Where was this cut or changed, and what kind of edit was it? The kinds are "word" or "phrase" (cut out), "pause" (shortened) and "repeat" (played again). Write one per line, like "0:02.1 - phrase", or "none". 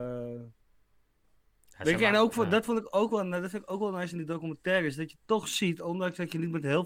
none

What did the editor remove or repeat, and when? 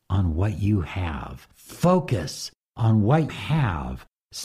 0:01.5 - pause
0:03.3 - word

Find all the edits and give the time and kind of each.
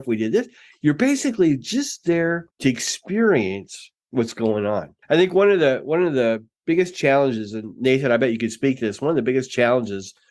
0:02.5 - pause
0:04.0 - pause
0:05.0 - pause

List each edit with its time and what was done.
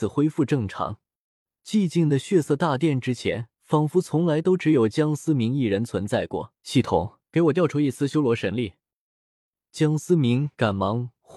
0:03.5 - pause
0:06.6 - pause
0:07.2 - pause

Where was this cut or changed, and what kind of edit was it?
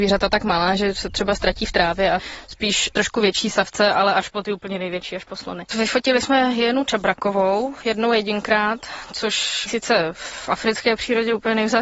0:02.9 - word
0:09.7 - word

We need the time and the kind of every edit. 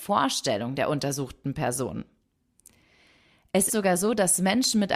0:03.7 - word

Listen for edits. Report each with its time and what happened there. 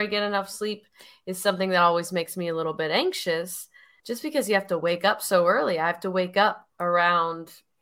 none

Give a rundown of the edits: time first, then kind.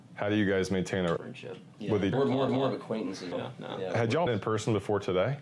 0:01.2 - word
0:02.1 - word
0:02.5 - repeat
0:03.3 - word
0:04.3 - word

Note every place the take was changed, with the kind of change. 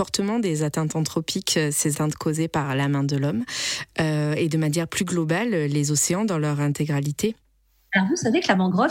0:01.9 - word

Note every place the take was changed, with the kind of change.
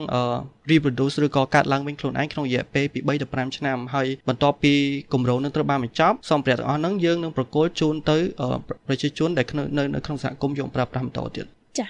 0:04.2 - pause
0:06.2 - pause
0:08.8 - pause

